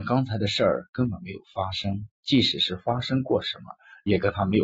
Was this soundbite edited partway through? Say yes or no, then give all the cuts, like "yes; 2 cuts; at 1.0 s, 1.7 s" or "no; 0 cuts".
yes; 1 cut; at 2.1 s